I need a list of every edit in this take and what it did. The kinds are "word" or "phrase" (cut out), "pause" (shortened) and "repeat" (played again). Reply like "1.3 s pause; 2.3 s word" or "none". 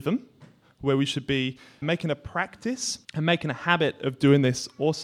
1.8 s word; 3.0 s pause